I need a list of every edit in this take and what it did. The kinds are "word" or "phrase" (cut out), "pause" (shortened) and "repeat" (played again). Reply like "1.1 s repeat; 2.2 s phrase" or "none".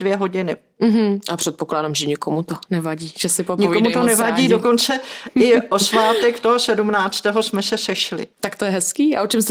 8.3 s pause